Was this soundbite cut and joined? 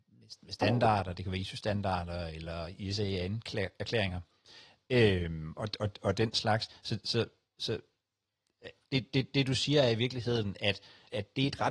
no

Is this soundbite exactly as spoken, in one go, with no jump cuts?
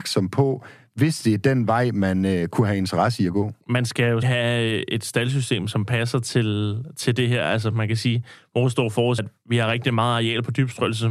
no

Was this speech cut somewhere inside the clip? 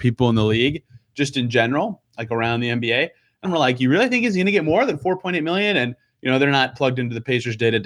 yes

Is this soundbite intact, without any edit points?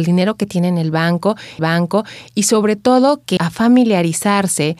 no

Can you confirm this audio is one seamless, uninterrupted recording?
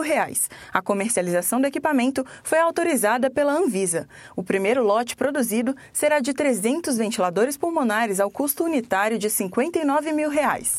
yes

